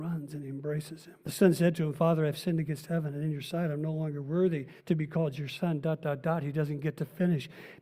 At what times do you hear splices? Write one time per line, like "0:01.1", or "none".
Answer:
0:01.2
0:04.8